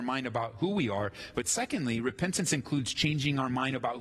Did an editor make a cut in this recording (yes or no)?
no